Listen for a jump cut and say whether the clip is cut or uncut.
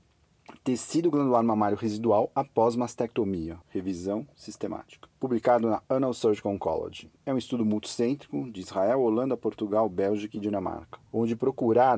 cut